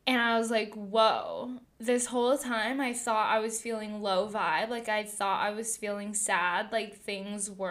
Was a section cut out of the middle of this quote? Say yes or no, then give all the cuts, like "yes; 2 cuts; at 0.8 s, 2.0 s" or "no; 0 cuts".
no; 0 cuts